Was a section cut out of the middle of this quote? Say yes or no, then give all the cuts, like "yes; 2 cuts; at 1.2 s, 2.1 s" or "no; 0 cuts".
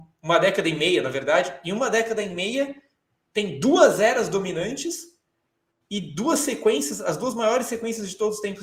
no; 0 cuts